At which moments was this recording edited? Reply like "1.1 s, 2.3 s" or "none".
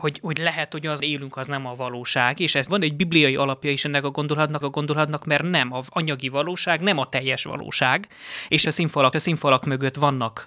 1.0 s, 2.7 s, 4.6 s, 8.6 s, 9.1 s